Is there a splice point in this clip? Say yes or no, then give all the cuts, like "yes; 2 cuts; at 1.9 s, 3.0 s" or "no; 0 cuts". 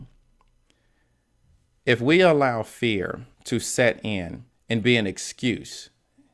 yes; 2 cuts; at 3.3 s, 4.5 s